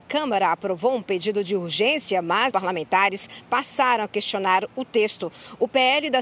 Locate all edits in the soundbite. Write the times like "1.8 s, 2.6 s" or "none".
2.5 s